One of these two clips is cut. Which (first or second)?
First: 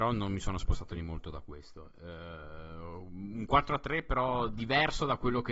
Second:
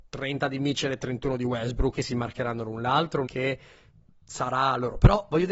second